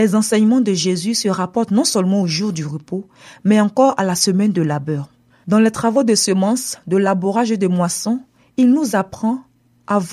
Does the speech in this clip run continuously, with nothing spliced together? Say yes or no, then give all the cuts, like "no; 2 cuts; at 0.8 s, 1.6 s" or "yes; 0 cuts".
yes; 0 cuts